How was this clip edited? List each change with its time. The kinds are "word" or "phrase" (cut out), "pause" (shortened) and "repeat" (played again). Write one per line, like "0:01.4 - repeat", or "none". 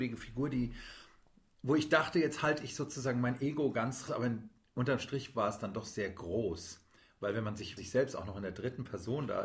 0:04.1 - word
0:07.8 - word

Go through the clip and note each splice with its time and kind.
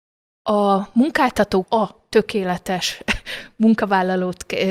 0:01.6 - word

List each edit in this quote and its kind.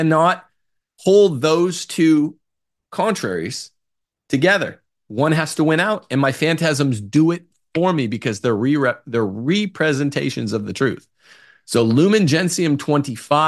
none

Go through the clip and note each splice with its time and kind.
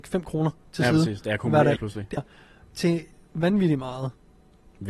0:01.8 - word
0:02.2 - word
0:03.1 - pause

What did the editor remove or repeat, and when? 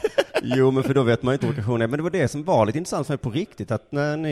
0:01.4 - word

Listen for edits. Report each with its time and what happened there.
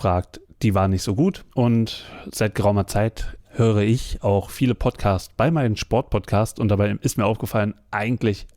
0:01.5 - pause
0:03.4 - word

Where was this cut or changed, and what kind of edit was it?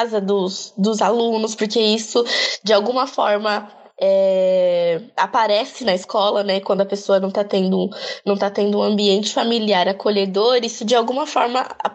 none

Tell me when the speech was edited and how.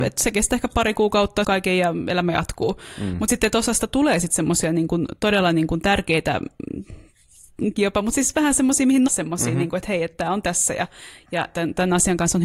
0:01.4 - phrase
0:07.8 - phrase
0:09.1 - word

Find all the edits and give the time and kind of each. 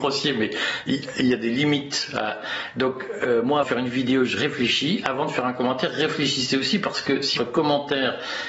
0:03.6 - word
0:07.4 - word

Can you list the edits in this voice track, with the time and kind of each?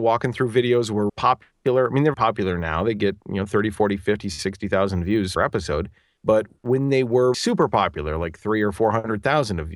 0:01.1 - word
0:02.1 - word
0:05.4 - word
0:07.3 - word

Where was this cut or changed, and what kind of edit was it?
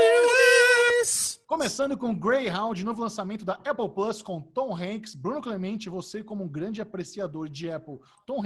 0:01.4 - pause

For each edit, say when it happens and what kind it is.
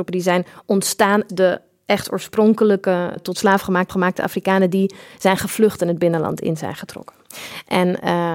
0:01.3 - word
0:03.2 - word
0:03.9 - repeat

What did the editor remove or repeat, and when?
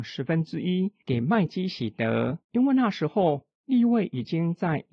0:02.4 - pause

